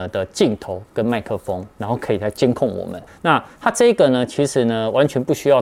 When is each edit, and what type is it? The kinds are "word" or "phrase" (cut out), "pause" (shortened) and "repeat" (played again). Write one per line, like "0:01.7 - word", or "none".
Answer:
0:01.7 - pause
0:03.1 - word

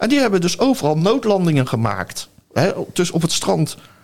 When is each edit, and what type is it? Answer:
none

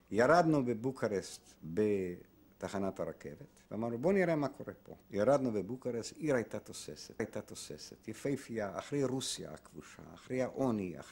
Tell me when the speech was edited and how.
0:01.6 - pause
0:03.7 - pause
0:05.0 - pause
0:07.2 - repeat

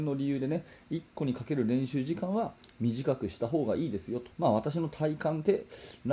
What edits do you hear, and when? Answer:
0:04.3 - word

